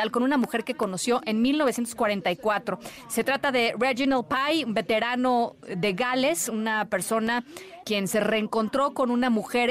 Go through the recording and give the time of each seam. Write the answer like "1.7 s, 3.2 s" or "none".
7.8 s